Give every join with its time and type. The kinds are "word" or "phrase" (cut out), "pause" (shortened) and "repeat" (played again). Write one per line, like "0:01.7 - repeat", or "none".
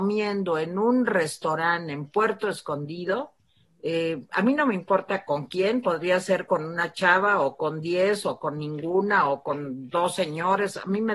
none